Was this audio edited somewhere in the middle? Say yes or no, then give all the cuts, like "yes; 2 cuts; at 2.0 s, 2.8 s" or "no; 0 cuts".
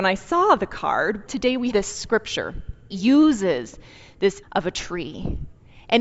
yes; 4 cuts; at 1.3 s, 1.7 s, 2.9 s, 4.4 s